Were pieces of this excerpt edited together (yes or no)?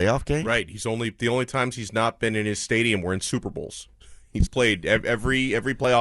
yes